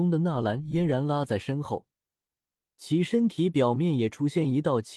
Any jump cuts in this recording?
no; 0 cuts

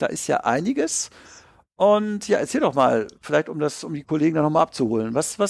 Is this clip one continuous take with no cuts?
yes; 0 cuts

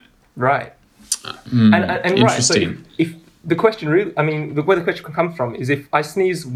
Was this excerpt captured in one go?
yes; 0 cuts

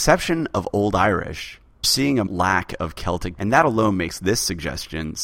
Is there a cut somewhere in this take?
yes; 3 cuts; at 1.8 s, 2.3 s, 3.4 s

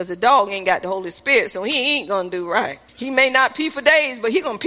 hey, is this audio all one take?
no; 1 cut; at 2.9 s

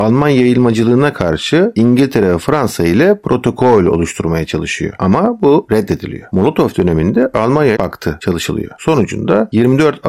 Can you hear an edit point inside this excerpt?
yes; 1 cut; at 7.8 s

